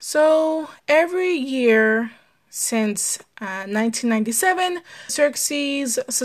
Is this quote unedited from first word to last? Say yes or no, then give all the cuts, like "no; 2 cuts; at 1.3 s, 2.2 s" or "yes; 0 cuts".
no; 2 cuts; at 2.5 s, 5.1 s